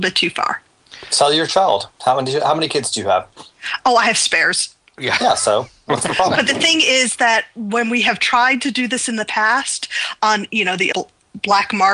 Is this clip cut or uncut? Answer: cut